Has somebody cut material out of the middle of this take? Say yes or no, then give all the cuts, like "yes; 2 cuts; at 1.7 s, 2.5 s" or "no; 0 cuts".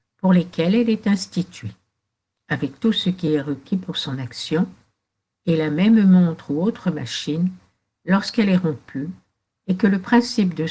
no; 0 cuts